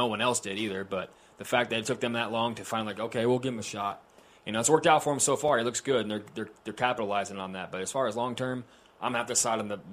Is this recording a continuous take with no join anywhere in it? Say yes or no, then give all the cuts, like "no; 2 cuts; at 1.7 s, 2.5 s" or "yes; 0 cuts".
yes; 0 cuts